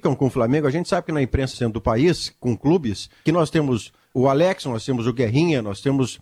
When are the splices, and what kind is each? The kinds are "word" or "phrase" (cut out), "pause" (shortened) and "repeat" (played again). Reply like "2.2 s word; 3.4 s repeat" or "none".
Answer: 1.5 s word; 2.6 s word; 3.3 s word; 4.1 s word